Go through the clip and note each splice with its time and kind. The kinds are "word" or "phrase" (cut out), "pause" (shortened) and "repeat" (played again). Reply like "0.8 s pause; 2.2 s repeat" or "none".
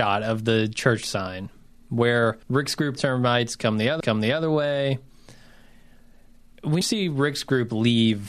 2.4 s pause; 3.0 s phrase; 4.0 s repeat; 6.8 s word